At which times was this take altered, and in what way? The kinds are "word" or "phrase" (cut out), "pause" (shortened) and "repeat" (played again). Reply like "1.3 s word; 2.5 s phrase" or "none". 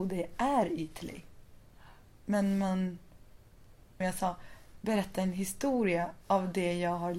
4.0 s phrase